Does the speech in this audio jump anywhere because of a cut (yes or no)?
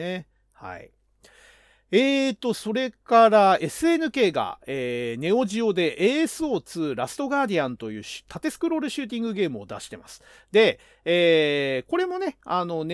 no